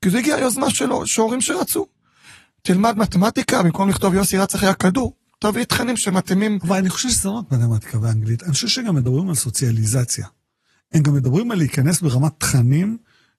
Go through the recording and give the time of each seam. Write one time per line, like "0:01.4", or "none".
none